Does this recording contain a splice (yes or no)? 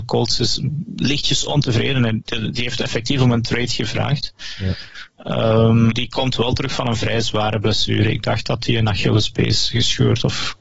yes